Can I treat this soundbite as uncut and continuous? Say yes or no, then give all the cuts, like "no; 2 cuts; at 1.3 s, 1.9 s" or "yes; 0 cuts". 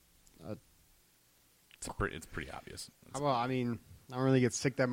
yes; 0 cuts